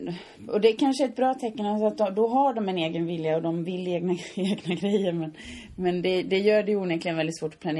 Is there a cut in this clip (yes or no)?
no